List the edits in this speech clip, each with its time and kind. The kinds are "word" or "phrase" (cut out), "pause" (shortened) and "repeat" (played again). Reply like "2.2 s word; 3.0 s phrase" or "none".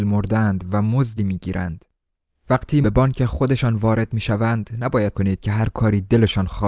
1.2 s word; 2.8 s word; 5.1 s word